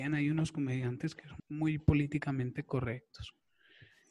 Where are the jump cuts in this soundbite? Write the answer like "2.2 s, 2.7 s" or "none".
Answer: 1.4 s